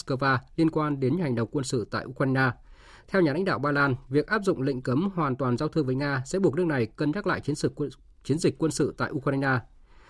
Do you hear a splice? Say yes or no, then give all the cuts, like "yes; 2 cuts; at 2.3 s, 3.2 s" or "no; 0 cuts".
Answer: no; 0 cuts